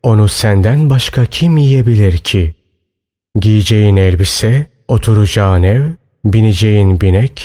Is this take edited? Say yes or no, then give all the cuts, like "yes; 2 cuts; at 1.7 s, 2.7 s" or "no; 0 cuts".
no; 0 cuts